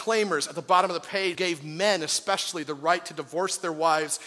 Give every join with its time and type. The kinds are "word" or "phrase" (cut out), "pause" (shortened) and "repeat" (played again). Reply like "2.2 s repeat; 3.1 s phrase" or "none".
1.3 s word